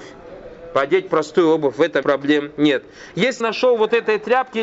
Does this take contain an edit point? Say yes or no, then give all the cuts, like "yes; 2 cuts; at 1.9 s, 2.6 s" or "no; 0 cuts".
yes; 2 cuts; at 2.0 s, 3.4 s